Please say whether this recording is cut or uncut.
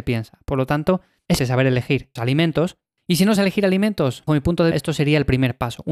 cut